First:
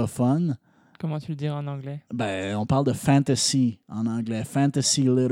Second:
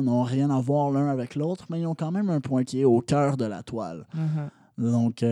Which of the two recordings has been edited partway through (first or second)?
second